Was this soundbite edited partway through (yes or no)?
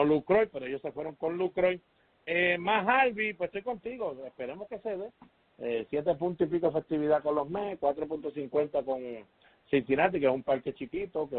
no